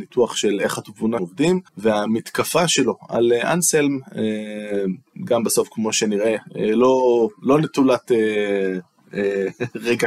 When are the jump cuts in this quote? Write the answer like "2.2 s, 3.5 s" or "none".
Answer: 1.2 s, 1.7 s